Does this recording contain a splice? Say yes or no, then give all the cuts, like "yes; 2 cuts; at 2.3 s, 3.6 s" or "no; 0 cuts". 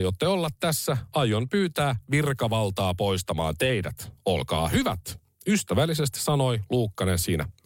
no; 0 cuts